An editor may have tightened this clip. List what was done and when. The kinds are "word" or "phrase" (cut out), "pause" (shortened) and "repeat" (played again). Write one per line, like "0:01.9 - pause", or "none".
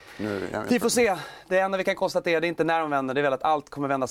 none